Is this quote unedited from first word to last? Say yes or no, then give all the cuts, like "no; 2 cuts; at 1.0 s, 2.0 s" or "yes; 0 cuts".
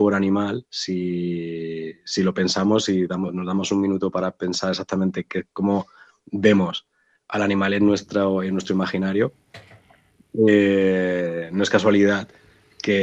yes; 0 cuts